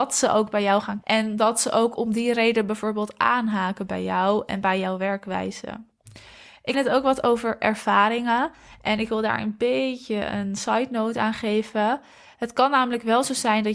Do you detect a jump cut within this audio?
yes; 2 cuts; at 1.0 s, 6.7 s

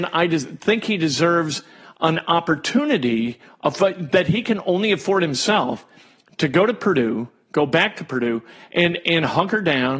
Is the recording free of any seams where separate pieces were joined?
yes; 0 cuts

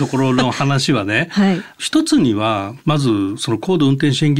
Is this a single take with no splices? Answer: no; 1 cut; at 2.8 s

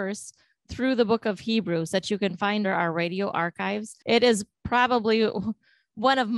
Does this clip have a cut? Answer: yes; 2 cuts; at 2.6 s, 4.0 s

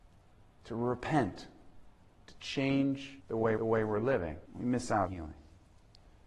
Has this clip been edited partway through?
yes; 4 cuts; at 3.2 s, 3.6 s, 4.4 s, 5.1 s

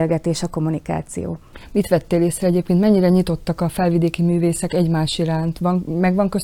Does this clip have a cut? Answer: no; 0 cuts

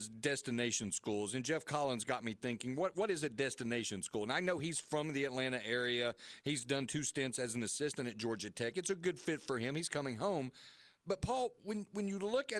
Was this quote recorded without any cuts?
yes; 0 cuts

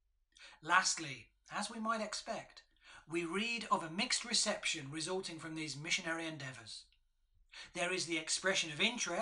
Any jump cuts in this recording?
no; 0 cuts

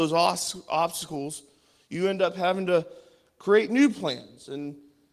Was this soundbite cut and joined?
no; 0 cuts

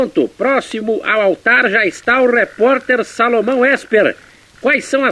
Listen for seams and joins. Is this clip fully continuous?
yes; 0 cuts

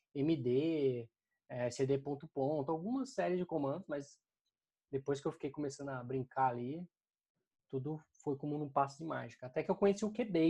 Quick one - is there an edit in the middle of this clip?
no; 0 cuts

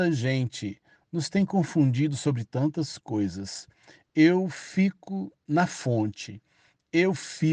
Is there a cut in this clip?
no; 0 cuts

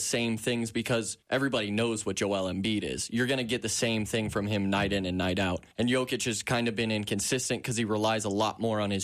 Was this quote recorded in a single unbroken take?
no; 2 cuts; at 1.2 s, 5.7 s

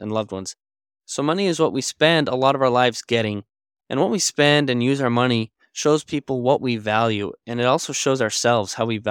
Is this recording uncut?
yes; 0 cuts

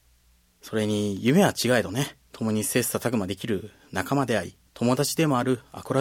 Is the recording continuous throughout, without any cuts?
no; 2 cuts; at 2.3 s, 4.7 s

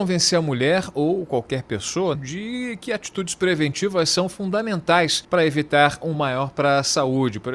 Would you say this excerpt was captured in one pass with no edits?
no; 3 cuts; at 2.2 s, 5.2 s, 6.1 s

